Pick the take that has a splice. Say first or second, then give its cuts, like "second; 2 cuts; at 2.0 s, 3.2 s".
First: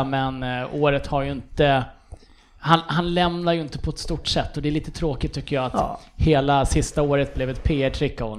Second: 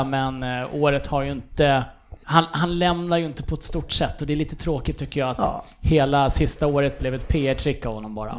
second; 1 cut; at 2.2 s